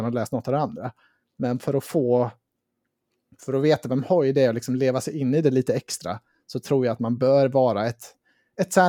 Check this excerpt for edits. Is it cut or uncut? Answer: uncut